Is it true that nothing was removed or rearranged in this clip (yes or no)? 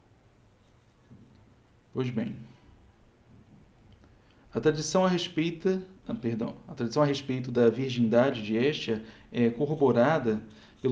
yes